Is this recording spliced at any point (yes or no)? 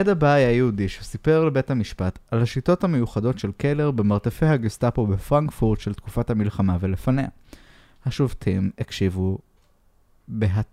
no